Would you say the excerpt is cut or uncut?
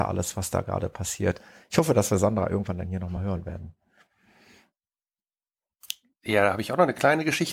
uncut